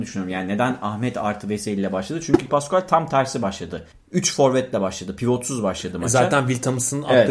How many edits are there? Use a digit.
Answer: 2